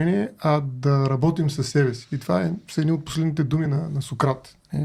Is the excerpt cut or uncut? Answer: uncut